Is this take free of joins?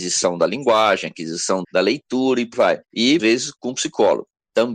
no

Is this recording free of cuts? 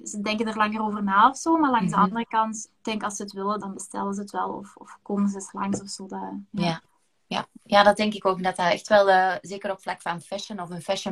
no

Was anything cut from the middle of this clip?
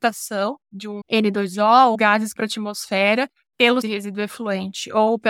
yes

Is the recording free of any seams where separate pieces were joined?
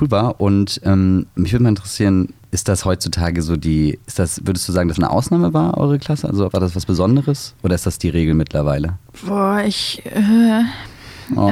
no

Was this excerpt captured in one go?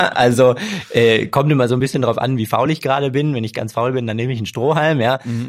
yes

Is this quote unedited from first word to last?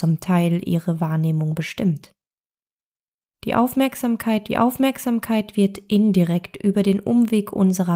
no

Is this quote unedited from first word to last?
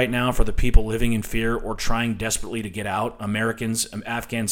yes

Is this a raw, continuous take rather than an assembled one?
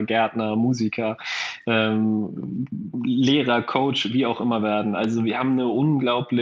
yes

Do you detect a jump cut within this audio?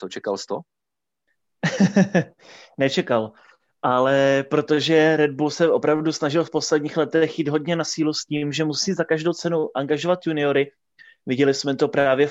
no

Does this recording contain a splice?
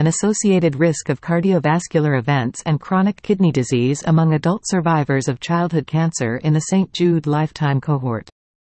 no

